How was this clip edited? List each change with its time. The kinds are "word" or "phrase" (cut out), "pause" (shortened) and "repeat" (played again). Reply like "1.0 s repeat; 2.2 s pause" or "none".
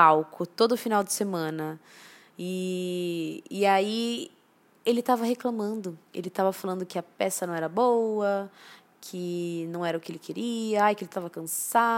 6.1 s pause